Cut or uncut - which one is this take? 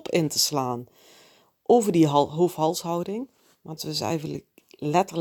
cut